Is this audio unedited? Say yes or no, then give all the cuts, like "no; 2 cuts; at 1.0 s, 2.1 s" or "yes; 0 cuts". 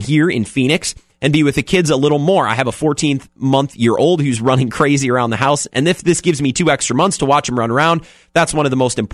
yes; 0 cuts